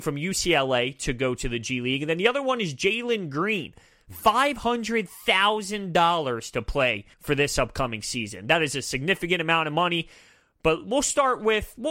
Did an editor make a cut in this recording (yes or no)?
yes